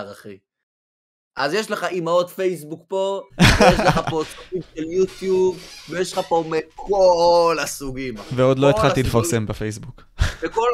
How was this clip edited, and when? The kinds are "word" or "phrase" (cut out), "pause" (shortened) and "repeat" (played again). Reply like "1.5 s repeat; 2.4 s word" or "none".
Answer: none